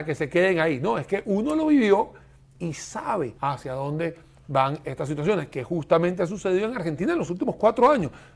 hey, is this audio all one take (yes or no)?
no